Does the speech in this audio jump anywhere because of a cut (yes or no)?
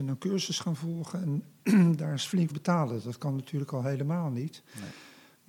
yes